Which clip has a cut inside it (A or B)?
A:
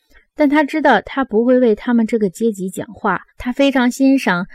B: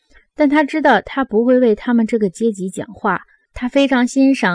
A